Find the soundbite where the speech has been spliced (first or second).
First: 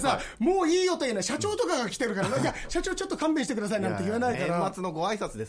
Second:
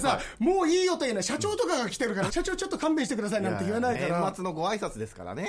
second